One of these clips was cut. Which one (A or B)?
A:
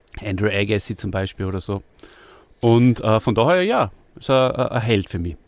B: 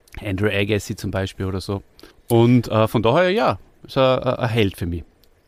B